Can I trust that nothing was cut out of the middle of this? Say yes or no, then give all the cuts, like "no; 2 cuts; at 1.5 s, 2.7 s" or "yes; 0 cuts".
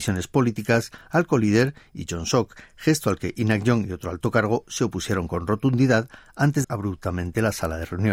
no; 1 cut; at 6.6 s